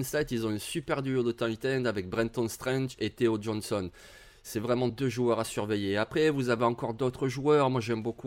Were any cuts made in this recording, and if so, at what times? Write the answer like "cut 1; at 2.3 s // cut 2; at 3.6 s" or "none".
none

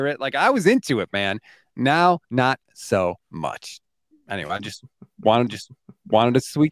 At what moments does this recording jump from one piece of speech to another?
cut 1; at 2.2 s // cut 2; at 3.2 s // cut 3; at 5.5 s

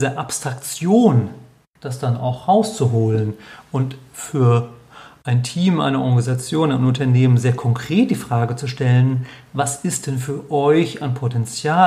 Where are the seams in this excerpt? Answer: none

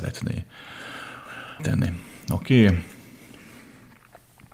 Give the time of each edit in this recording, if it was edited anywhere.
cut 1; at 1.6 s

